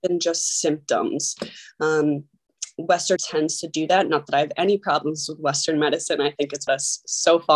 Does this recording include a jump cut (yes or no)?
yes